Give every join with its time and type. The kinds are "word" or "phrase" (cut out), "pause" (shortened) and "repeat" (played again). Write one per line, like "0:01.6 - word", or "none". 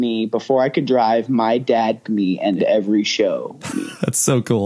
0:02.0 - word
0:02.6 - word
0:03.7 - word